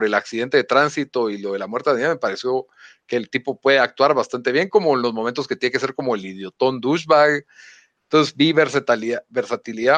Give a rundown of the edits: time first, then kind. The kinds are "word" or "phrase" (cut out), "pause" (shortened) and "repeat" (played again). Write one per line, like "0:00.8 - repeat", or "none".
none